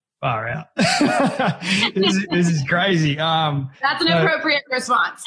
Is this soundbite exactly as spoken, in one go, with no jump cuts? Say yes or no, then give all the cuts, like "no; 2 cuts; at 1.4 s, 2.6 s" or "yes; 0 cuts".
no; 1 cut; at 3.7 s